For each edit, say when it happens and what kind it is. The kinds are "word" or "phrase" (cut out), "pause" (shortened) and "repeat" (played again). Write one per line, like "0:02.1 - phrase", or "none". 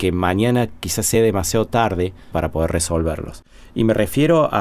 none